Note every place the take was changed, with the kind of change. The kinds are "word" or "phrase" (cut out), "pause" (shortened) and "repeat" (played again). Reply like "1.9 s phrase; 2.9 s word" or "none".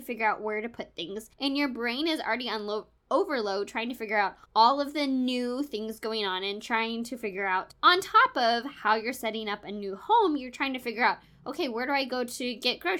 1.3 s pause; 4.5 s pause